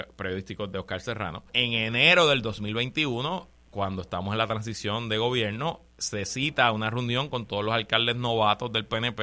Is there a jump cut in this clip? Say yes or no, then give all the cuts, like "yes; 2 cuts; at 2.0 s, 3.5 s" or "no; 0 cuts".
yes; 1 cut; at 1.5 s